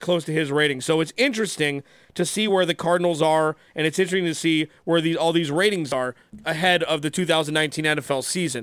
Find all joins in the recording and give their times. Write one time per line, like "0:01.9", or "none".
none